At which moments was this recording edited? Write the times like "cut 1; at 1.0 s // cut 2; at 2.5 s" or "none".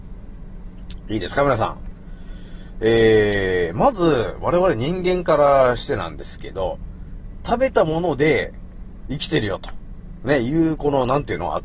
cut 1; at 7.4 s